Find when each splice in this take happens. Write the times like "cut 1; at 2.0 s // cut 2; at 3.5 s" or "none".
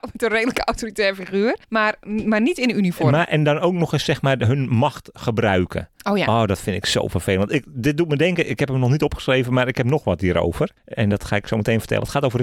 cut 1; at 1.6 s // cut 2; at 10.8 s